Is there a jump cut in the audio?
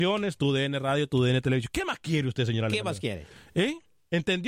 no; 0 cuts

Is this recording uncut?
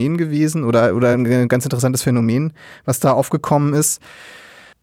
yes; 0 cuts

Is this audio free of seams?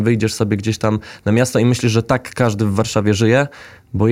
yes; 0 cuts

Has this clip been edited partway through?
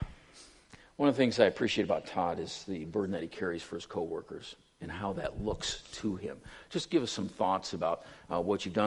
no; 0 cuts

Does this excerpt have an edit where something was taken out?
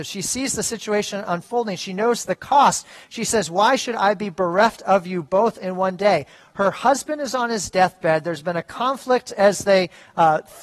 no; 0 cuts

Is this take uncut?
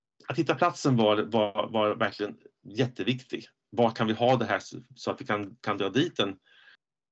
yes; 0 cuts

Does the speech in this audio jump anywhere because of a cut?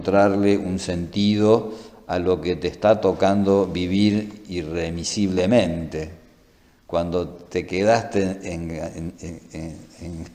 no; 0 cuts

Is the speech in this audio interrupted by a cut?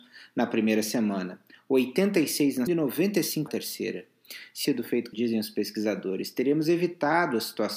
yes; 4 cuts; at 2.7 s, 3.5 s, 4.6 s, 5.1 s

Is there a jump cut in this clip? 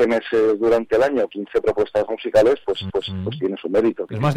yes; 2 cuts; at 1.3 s, 2.9 s

